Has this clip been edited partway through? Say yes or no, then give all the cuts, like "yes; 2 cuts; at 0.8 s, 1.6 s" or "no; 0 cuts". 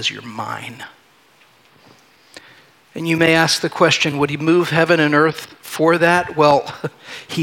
no; 0 cuts